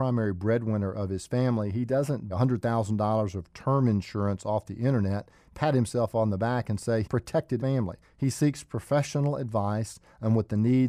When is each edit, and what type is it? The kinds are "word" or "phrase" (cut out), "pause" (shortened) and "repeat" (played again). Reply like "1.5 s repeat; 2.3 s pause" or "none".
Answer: 2.3 s word; 7.0 s word; 7.6 s word; 8.0 s pause